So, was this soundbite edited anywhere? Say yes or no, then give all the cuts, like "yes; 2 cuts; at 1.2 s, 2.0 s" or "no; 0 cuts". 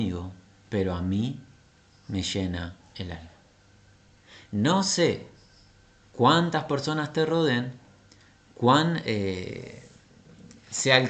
no; 0 cuts